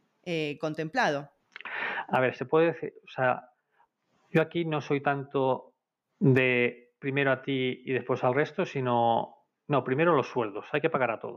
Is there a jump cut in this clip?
no; 0 cuts

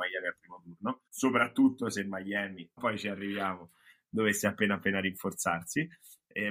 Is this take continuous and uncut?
no; 2 cuts; at 1.1 s, 2.8 s

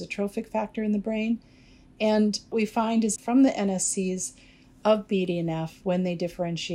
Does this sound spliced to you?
yes; 2 cuts; at 2.5 s, 3.2 s

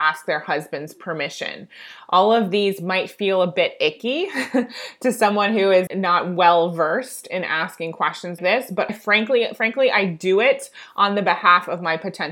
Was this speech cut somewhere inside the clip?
yes; 3 cuts; at 5.9 s, 8.4 s, 8.9 s

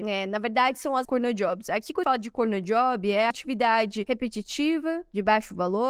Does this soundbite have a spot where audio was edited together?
yes; 3 cuts; at 1.0 s, 2.0 s, 3.3 s

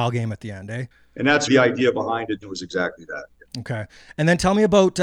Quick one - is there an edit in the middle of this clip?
yes; 3 cuts; at 0.9 s, 1.5 s, 2.4 s

